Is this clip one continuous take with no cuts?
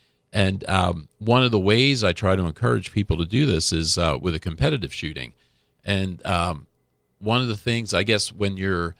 yes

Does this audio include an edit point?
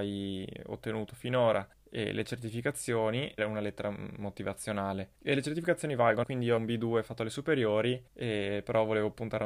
yes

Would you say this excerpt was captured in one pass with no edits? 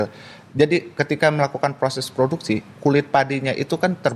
yes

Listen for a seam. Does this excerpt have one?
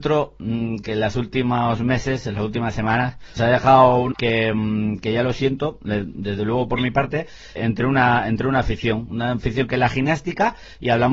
yes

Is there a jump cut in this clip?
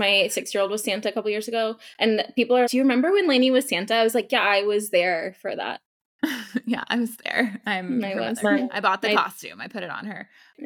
yes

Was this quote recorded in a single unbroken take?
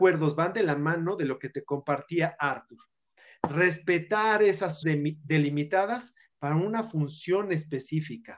no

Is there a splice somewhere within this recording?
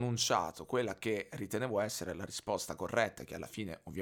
no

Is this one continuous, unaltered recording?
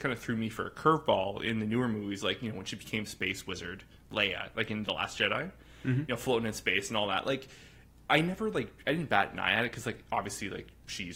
yes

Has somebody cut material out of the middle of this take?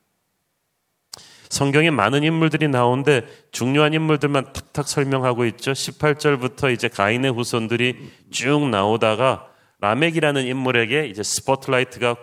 no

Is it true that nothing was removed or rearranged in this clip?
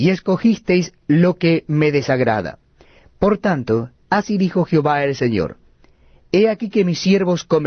yes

